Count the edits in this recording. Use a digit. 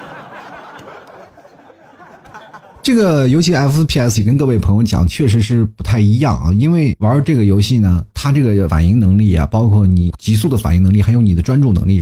3